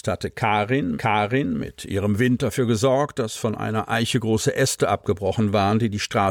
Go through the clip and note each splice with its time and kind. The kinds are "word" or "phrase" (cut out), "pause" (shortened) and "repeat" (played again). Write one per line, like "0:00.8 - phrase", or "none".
0:00.9 - repeat